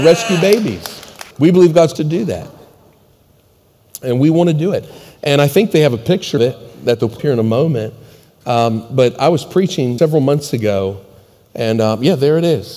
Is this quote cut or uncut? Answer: cut